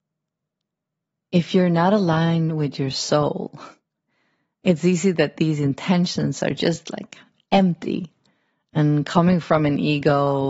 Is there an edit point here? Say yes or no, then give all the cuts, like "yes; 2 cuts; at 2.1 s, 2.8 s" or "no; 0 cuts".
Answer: no; 0 cuts